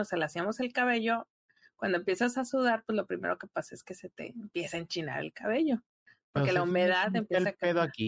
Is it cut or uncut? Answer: uncut